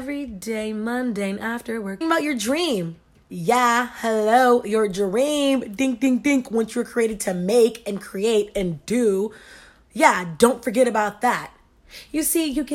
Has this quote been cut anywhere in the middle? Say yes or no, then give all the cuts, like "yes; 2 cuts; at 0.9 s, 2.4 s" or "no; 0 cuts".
yes; 1 cut; at 2.0 s